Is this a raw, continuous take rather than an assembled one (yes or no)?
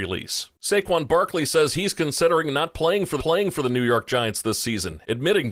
no